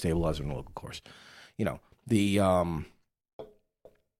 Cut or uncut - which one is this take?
uncut